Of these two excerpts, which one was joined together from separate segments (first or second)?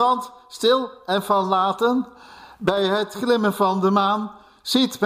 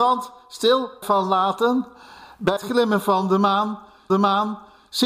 second